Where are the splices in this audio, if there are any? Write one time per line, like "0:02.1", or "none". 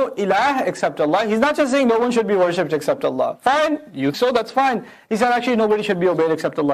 0:04.1

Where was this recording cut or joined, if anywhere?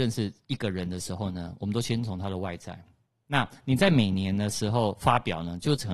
none

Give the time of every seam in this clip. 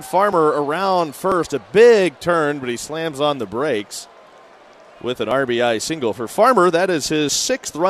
none

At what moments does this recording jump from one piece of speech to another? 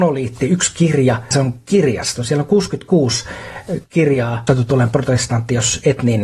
0:01.3
0:04.5

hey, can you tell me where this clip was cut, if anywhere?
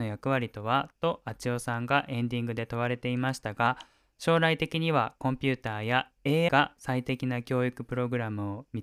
0:06.5

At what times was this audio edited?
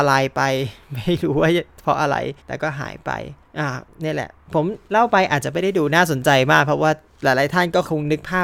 0:02.4

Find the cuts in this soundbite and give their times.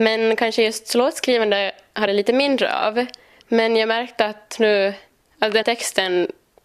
0:02.1
0:05.6

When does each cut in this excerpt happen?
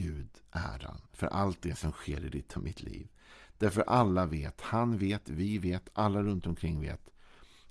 0:01.1

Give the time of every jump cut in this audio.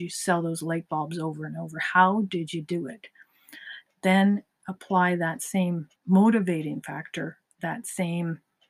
0:06.0

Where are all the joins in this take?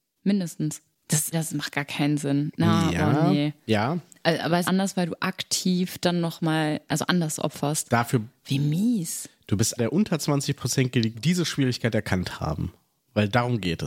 0:01.3
0:03.6
0:04.6
0:06.9
0:09.8
0:11.1

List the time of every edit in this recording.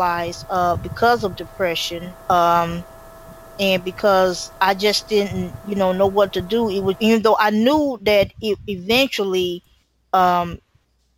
0:02.2
0:04.6
0:07.0

